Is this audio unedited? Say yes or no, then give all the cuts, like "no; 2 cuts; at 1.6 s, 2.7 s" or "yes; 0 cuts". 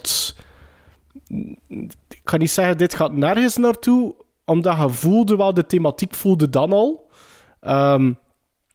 yes; 0 cuts